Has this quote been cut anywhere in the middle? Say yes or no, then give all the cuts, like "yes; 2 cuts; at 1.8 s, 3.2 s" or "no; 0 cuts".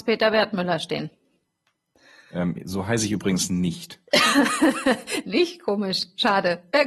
no; 0 cuts